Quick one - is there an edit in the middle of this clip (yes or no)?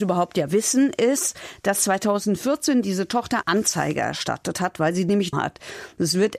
yes